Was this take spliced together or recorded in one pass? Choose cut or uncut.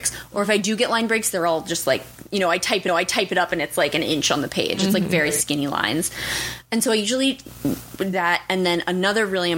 cut